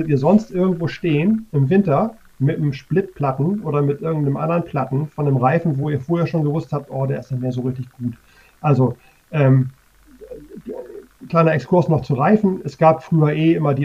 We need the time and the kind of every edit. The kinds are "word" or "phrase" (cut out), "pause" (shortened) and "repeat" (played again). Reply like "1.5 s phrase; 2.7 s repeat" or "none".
none